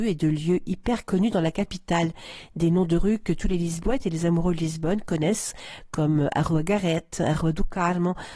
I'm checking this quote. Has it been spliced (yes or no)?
no